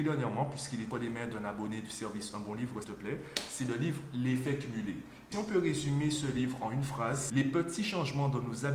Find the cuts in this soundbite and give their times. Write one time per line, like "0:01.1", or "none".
0:00.9
0:02.8
0:05.3
0:07.3